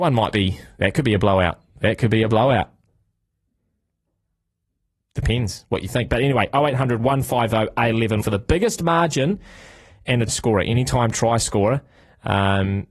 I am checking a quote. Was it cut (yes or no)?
yes